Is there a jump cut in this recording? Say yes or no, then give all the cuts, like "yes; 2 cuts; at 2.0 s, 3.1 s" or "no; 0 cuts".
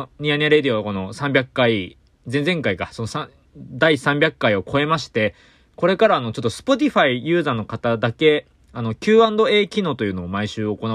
no; 0 cuts